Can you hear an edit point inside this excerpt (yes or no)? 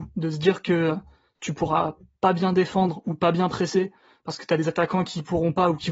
no